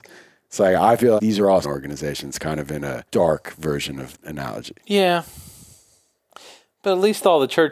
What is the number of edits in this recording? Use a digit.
5